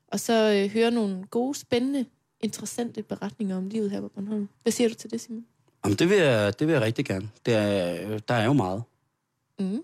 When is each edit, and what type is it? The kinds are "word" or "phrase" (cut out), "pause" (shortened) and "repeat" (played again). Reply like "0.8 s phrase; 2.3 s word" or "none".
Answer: 4.6 s pause; 5.5 s pause